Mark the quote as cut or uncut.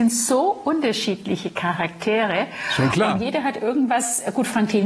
uncut